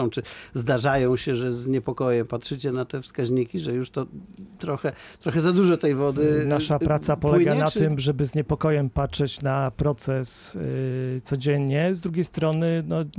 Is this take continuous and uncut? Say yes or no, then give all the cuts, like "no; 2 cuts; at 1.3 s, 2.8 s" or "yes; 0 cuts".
yes; 0 cuts